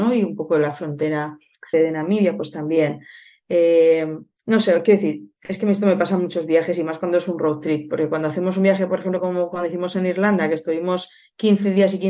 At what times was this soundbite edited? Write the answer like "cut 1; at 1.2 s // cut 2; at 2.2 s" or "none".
cut 1; at 1.7 s